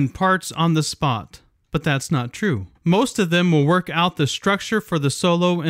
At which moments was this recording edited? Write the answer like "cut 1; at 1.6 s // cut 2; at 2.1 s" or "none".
cut 1; at 2.7 s

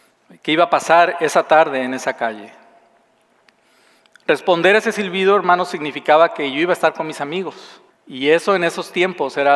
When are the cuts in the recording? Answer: cut 1; at 7.9 s

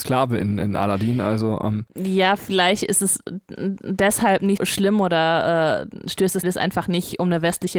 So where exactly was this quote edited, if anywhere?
cut 1; at 4.6 s // cut 2; at 6.4 s

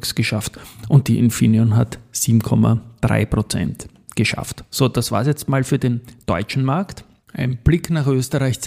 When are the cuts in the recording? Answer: cut 1; at 4.1 s

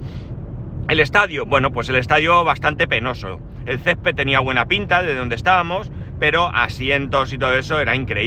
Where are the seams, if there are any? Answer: none

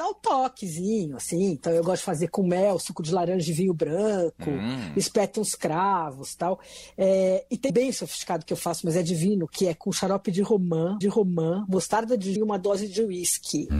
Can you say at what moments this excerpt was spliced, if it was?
cut 1; at 7.7 s // cut 2; at 11.0 s // cut 3; at 12.4 s

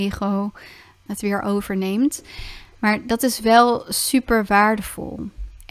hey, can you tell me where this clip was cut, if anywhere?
cut 1; at 1.1 s

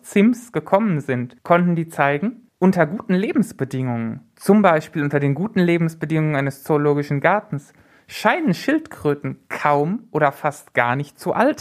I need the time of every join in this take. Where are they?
none

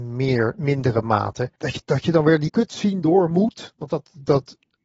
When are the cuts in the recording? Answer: cut 1; at 1.6 s // cut 2; at 2.5 s

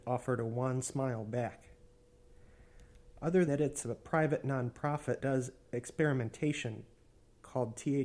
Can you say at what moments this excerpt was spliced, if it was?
cut 1; at 3.5 s // cut 2; at 5.2 s // cut 3; at 5.7 s

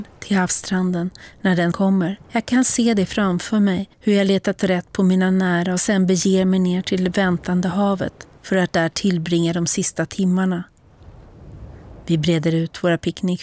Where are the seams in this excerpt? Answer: cut 1; at 1.7 s // cut 2; at 2.2 s // cut 3; at 3.9 s // cut 4; at 8.4 s

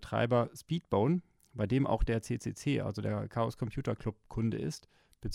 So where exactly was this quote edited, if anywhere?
none

